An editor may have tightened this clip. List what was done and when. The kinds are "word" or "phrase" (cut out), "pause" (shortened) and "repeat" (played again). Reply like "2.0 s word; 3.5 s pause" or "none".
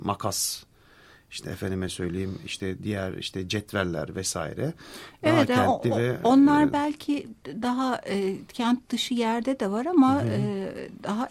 none

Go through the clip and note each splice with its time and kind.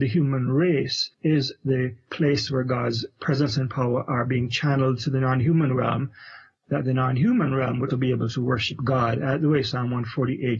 1.1 s pause; 7.9 s word

